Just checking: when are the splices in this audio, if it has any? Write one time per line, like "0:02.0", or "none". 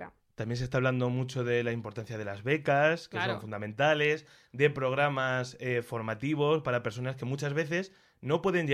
none